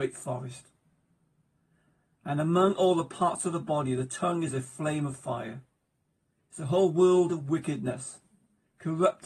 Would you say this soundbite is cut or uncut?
uncut